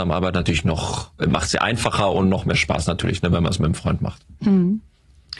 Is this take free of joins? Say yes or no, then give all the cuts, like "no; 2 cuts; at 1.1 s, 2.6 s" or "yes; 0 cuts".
yes; 0 cuts